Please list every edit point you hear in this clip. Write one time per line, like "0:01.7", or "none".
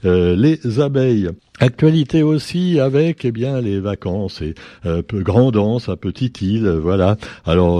0:01.4